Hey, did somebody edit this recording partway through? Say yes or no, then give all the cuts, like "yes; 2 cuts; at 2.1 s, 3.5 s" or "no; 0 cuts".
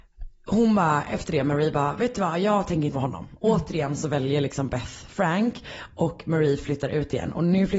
yes; 1 cut; at 2.9 s